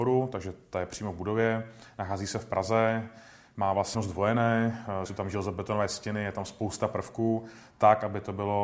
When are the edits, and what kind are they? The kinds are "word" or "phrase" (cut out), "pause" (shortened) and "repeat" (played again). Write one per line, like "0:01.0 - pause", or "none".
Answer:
0:03.9 - word
0:05.1 - word